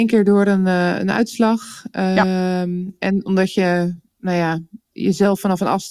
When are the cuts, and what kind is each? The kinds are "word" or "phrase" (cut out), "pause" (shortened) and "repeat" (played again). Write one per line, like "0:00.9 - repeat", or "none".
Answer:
none